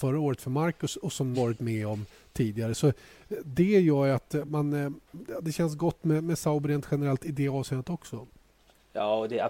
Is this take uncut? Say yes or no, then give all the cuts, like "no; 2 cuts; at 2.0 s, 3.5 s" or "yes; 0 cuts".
no; 3 cuts; at 1.3 s, 4.5 s, 5.1 s